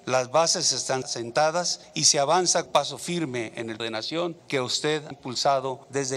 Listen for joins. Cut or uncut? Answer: cut